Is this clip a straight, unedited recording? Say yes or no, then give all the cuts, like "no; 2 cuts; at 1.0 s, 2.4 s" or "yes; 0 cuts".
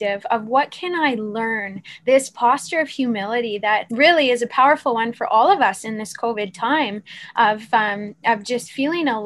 no; 1 cut; at 3.9 s